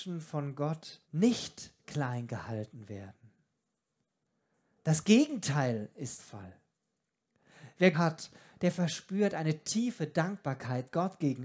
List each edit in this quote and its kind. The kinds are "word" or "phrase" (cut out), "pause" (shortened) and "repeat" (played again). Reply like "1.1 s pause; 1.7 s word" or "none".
1.0 s pause; 6.2 s word; 7.9 s phrase